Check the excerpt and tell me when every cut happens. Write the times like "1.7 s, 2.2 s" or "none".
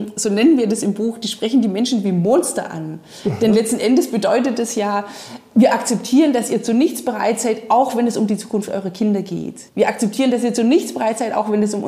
9.7 s